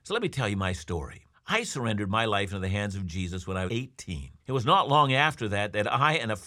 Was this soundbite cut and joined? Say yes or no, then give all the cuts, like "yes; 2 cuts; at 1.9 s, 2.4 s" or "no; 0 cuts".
yes; 3 cuts; at 1.3 s, 3.7 s, 4.4 s